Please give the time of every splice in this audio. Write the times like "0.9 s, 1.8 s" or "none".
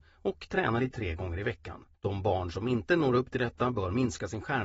0.9 s, 1.9 s